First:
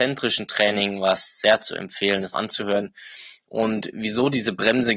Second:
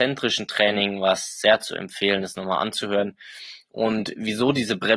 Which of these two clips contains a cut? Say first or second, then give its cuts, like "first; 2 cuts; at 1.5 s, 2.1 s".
first; 1 cut; at 2.3 s